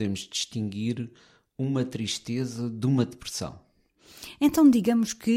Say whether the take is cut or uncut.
uncut